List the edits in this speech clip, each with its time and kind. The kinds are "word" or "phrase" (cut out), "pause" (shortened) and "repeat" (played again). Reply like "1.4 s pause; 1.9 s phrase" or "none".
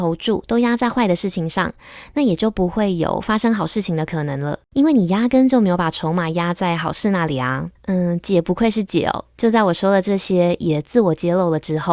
4.6 s pause; 7.8 s pause